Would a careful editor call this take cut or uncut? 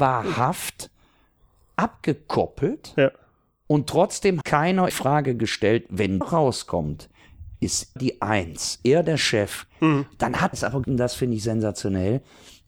cut